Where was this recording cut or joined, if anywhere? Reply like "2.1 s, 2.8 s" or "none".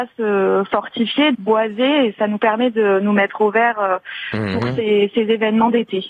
1.3 s